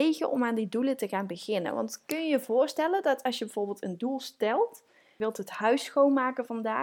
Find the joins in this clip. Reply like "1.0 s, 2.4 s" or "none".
none